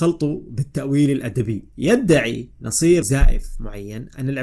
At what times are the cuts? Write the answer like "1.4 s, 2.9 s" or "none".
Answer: 1.7 s, 3.0 s